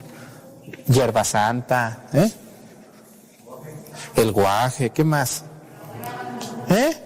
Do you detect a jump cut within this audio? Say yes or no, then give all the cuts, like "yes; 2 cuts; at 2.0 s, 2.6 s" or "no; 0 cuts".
no; 0 cuts